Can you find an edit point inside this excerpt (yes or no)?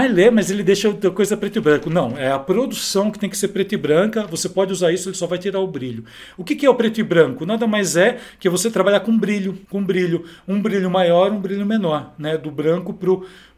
yes